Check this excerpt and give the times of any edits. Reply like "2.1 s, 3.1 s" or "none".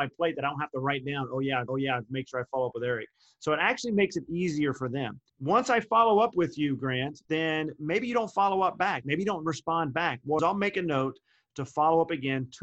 1.7 s, 5.3 s, 7.3 s, 10.4 s